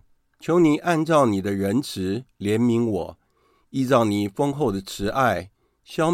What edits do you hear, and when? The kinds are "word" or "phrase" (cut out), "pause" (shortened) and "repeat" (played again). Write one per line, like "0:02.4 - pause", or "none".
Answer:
0:02.3 - pause